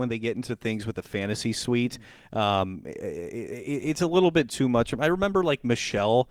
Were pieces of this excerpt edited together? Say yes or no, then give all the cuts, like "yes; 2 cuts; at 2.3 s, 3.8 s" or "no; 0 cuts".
no; 0 cuts